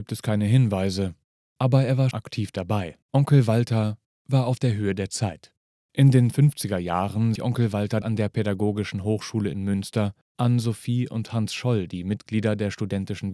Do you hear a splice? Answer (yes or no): yes